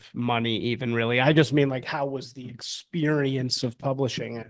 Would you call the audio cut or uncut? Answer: uncut